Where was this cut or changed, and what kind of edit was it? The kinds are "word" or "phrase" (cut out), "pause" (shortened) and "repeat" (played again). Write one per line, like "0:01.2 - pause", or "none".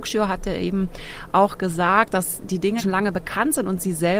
0:02.8 - word